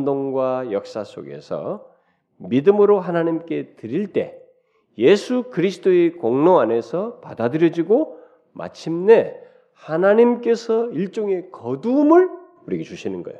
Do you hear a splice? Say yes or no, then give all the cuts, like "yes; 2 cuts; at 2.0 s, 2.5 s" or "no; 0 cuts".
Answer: no; 0 cuts